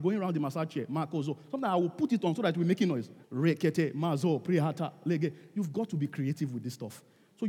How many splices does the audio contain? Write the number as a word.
one